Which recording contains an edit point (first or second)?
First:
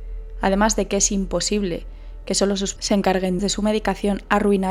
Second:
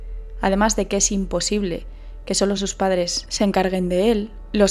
first